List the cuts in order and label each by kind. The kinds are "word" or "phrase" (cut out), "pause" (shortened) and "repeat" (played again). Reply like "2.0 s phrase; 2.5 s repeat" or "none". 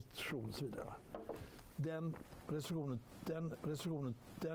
3.6 s repeat